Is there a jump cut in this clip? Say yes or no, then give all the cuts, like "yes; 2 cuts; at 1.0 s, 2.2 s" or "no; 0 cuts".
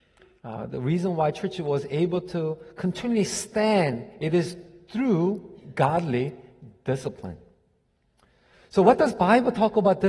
no; 0 cuts